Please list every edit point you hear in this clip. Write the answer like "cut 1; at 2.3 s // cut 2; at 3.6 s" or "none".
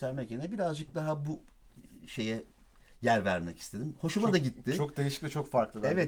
none